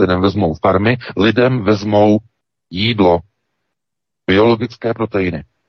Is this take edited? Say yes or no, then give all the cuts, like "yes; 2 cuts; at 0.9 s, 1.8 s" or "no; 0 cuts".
yes; 2 cuts; at 1.1 s, 2.4 s